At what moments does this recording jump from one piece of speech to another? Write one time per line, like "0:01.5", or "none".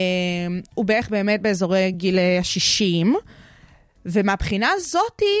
none